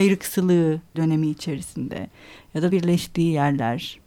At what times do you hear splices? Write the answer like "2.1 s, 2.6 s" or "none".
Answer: 0.9 s, 2.7 s